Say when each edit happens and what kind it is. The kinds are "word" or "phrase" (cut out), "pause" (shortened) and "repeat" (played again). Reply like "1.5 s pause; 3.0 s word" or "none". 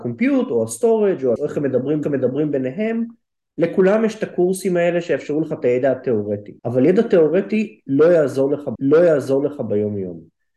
1.4 s word; 2.0 s repeat; 6.6 s pause; 8.8 s repeat